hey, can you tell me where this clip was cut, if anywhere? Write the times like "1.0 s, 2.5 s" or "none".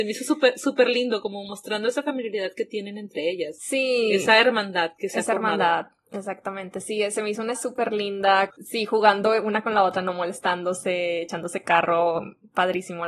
7.5 s, 8.5 s